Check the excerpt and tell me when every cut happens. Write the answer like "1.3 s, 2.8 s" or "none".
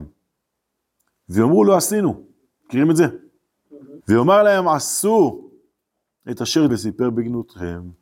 4.0 s, 6.7 s